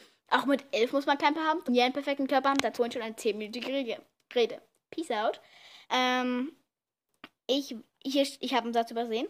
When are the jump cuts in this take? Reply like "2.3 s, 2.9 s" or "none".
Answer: 1.3 s, 1.7 s, 2.7 s, 5.8 s, 7.9 s